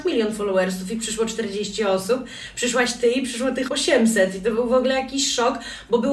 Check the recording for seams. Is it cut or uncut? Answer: cut